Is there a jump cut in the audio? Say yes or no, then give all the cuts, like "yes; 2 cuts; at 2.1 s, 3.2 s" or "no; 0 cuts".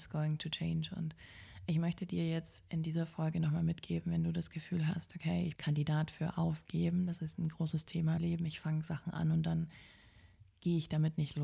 yes; 2 cuts; at 5.5 s, 8.2 s